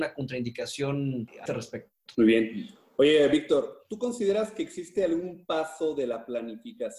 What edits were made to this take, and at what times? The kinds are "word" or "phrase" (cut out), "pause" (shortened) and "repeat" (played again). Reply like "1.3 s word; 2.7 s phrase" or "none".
1.5 s word

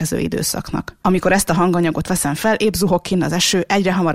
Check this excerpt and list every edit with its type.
1.0 s pause

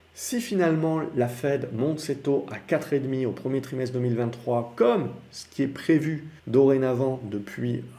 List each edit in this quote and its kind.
6.4 s pause

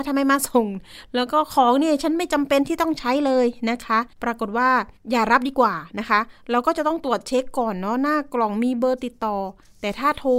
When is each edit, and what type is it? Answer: 4.1 s pause; 5.0 s pause

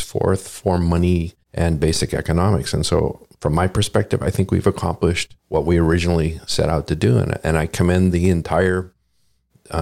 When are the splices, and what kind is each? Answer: 1.4 s pause; 3.3 s pause; 5.4 s pause

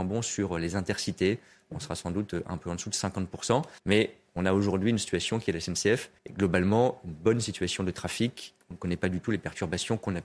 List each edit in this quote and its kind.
3.8 s pause; 6.2 s pause

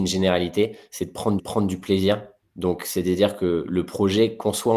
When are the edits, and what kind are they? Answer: 1.4 s repeat; 2.4 s pause

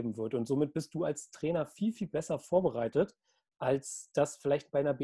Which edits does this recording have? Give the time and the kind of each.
none

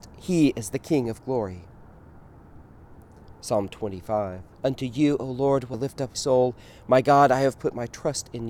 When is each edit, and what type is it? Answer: 4.5 s pause; 5.7 s word; 6.1 s word

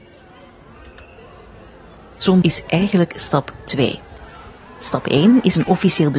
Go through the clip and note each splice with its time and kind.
2.4 s word

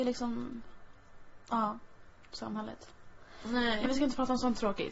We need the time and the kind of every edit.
3.9 s word

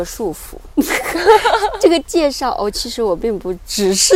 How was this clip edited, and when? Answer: none

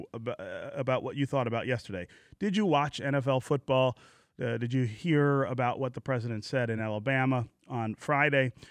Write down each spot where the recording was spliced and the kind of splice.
none

